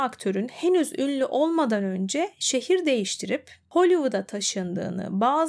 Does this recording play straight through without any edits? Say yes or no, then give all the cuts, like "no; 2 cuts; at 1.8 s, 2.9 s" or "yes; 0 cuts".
yes; 0 cuts